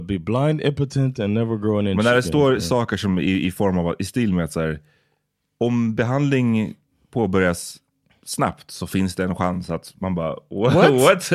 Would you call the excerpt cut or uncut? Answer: uncut